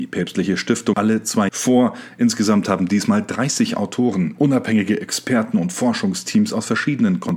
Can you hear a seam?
yes; 2 cuts; at 0.9 s, 1.5 s

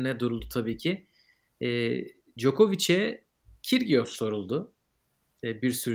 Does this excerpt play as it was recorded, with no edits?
yes; 0 cuts

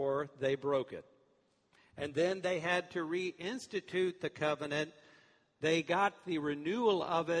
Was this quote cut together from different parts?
no; 0 cuts

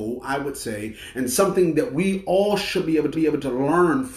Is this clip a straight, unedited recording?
no; 1 cut; at 3.1 s

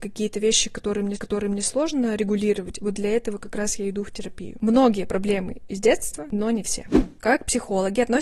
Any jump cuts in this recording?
yes; 1 cut; at 1.2 s

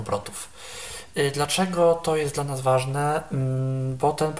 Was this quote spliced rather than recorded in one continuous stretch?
no; 0 cuts

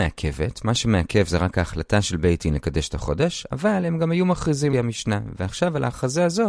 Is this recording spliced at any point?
yes; 1 cut; at 4.7 s

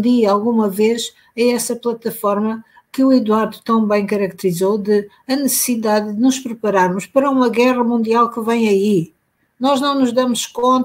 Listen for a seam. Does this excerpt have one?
no; 0 cuts

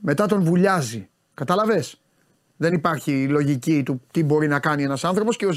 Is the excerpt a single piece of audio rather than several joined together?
yes; 0 cuts

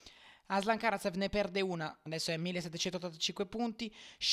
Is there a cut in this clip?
yes; 1 cut; at 2.1 s

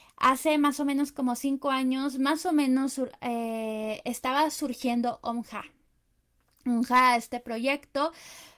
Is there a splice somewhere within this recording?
no; 0 cuts

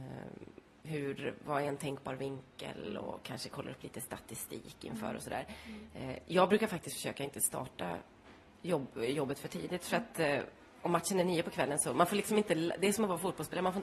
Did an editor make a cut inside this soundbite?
no; 0 cuts

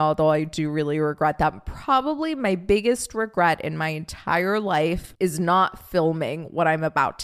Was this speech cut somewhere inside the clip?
yes; 1 cut; at 5.1 s

